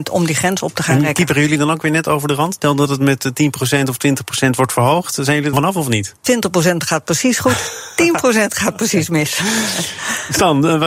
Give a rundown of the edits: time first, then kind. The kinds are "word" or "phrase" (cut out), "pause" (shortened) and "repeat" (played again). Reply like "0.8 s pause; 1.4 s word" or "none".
5.5 s phrase; 6.2 s pause